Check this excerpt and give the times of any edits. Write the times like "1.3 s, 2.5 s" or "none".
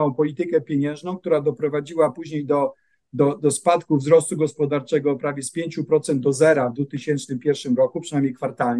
none